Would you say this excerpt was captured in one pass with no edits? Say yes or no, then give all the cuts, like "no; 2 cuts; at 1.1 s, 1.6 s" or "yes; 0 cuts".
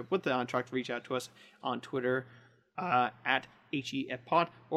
yes; 0 cuts